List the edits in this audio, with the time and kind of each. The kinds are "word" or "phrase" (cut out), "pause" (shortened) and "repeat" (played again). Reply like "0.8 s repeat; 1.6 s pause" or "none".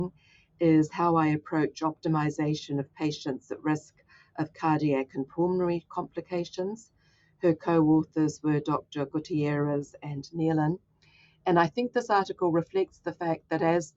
none